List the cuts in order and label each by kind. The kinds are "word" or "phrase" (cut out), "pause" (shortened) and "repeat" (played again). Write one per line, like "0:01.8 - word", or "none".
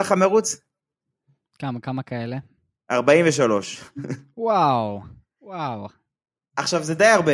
none